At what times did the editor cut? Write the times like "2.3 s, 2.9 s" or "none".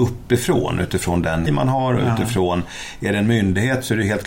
1.5 s